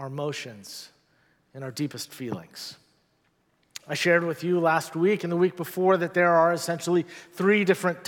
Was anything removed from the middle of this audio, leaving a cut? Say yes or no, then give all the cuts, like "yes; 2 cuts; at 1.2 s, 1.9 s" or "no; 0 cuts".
no; 0 cuts